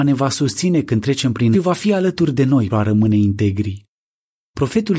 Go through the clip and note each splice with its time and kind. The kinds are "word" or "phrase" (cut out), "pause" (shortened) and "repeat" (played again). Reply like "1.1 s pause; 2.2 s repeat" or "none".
1.5 s phrase; 2.7 s word

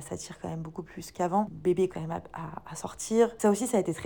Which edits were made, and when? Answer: 1.9 s word

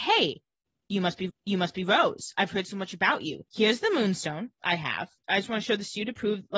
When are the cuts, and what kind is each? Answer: 1.3 s repeat; 3.5 s pause; 5.2 s pause

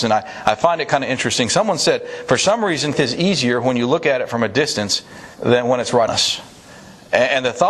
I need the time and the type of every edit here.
2.9 s word; 5.3 s pause; 6.1 s word

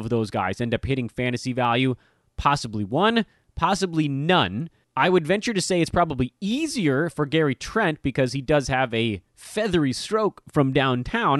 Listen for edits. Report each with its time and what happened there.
4.8 s pause

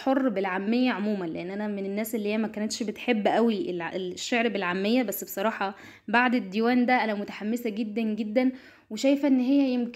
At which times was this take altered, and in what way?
none

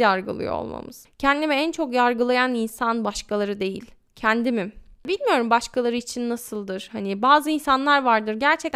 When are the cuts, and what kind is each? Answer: none

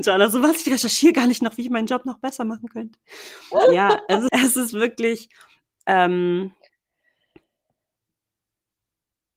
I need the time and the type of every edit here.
4.3 s word

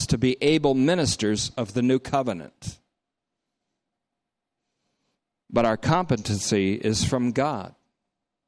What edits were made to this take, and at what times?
none

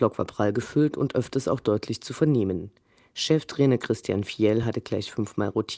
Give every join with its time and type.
none

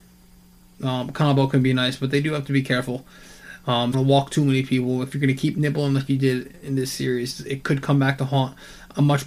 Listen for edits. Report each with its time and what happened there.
3.9 s phrase

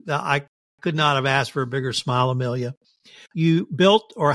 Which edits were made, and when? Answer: none

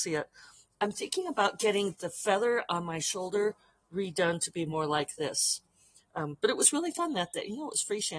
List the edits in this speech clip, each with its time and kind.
none

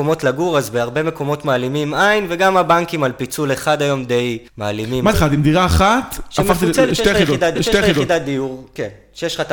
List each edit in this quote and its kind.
4.5 s pause; 5.1 s phrase; 7.6 s repeat

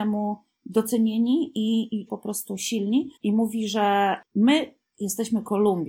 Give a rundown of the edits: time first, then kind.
2.1 s phrase; 3.2 s pause; 4.2 s pause

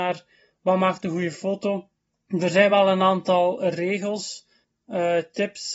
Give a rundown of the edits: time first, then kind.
none

